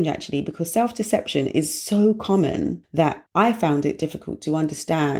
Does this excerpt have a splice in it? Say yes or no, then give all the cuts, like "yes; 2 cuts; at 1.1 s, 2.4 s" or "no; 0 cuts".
no; 0 cuts